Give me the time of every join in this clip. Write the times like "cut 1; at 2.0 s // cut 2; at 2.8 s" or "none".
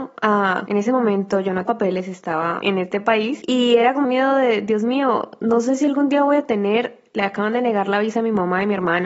cut 1; at 1.7 s // cut 2; at 2.6 s // cut 3; at 4.0 s

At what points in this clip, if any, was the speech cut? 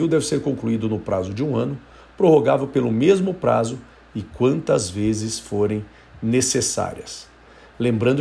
none

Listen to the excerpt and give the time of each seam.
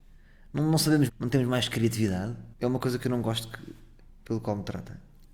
cut 1; at 1.1 s // cut 2; at 2.5 s

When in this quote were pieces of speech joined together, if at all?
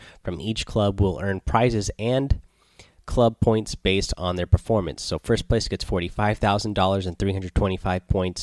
none

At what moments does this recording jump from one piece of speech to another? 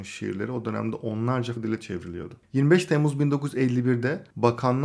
cut 1; at 1.6 s

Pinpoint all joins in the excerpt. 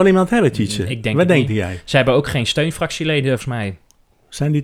cut 1; at 3.4 s

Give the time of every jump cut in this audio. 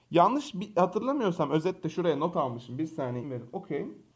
cut 1; at 3.2 s

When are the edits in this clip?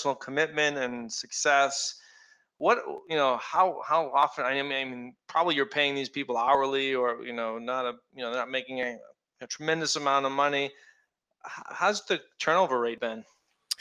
none

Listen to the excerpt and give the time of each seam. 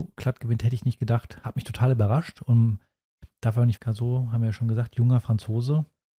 cut 1; at 3.8 s

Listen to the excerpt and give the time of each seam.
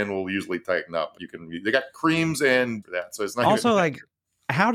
cut 1; at 1.2 s // cut 2; at 2.8 s

